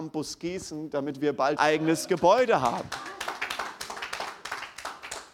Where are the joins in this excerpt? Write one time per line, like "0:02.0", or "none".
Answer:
0:01.6